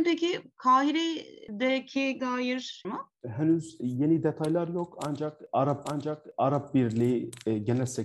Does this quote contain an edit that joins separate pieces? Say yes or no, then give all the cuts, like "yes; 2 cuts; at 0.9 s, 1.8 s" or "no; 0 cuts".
yes; 3 cuts; at 2.2 s, 2.8 s, 5.8 s